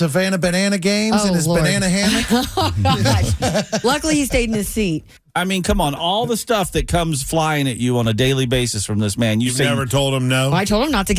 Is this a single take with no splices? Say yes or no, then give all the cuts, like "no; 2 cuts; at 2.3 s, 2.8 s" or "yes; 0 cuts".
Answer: yes; 0 cuts